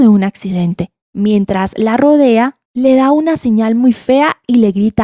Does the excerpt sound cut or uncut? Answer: cut